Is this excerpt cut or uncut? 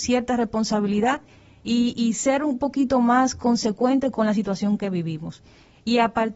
uncut